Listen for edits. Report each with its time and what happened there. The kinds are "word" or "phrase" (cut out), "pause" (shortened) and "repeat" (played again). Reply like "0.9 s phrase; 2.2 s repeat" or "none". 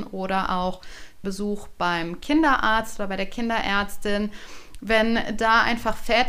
1.2 s word